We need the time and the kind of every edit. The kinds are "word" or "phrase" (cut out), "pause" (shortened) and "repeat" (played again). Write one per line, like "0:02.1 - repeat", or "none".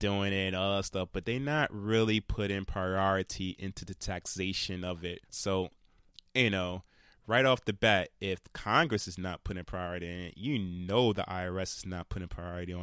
0:05.2 - pause